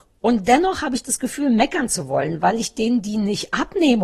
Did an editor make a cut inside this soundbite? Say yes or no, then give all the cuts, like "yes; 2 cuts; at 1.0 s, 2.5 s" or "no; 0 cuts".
no; 0 cuts